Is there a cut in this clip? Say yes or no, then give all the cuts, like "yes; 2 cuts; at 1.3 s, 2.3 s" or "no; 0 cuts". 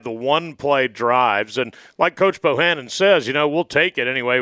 no; 0 cuts